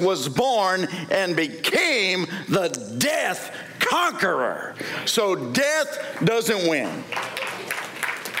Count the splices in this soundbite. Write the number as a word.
zero